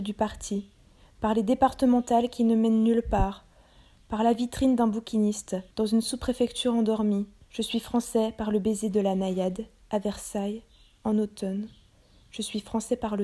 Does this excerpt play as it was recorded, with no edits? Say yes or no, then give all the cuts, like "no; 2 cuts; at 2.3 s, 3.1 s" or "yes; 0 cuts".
no; 2 cuts; at 5.7 s, 7.4 s